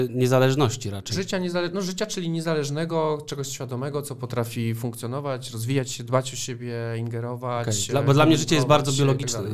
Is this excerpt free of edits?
yes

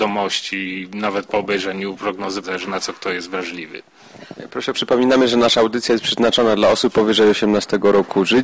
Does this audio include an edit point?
yes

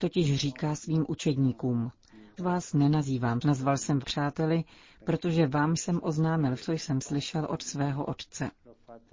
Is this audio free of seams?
no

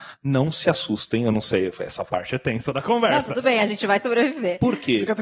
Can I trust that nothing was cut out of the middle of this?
yes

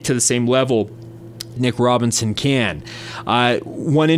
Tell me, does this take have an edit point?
yes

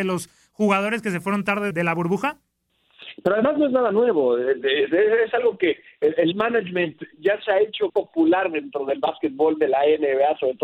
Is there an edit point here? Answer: yes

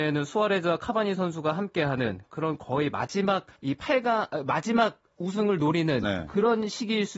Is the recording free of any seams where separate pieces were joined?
no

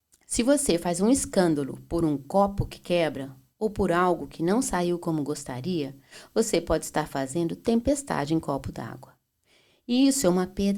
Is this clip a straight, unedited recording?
yes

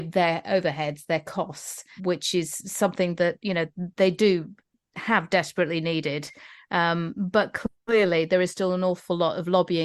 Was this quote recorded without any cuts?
no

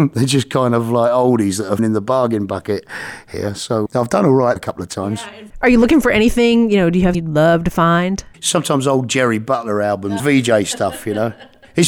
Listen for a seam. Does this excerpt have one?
yes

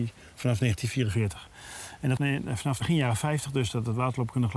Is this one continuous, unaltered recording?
no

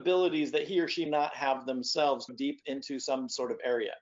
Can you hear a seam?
yes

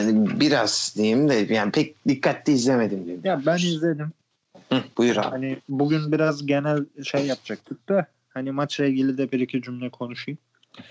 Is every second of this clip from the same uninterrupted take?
no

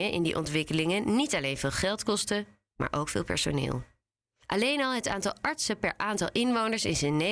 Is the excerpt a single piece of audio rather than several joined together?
yes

